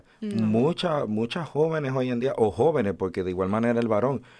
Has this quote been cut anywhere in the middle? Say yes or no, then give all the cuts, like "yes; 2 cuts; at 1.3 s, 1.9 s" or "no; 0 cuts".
no; 0 cuts